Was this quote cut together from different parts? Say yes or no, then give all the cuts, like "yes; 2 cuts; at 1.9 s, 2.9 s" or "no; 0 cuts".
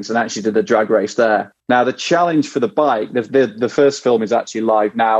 yes; 1 cut; at 1.6 s